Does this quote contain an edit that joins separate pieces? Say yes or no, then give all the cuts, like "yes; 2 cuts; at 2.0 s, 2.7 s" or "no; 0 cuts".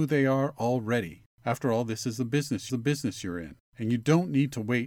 yes; 3 cuts; at 1.3 s, 2.7 s, 3.7 s